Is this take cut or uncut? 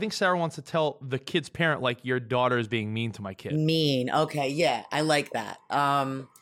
uncut